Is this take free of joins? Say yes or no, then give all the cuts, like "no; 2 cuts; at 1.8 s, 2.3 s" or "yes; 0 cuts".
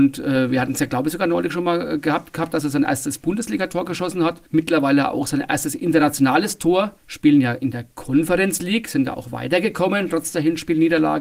no; 2 cuts; at 4.5 s, 7.0 s